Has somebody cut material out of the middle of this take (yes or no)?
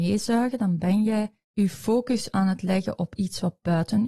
yes